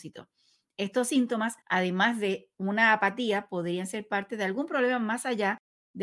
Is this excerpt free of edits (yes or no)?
no